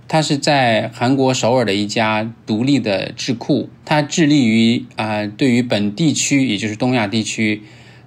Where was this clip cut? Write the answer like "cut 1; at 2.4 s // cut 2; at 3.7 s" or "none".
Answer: cut 1; at 3.7 s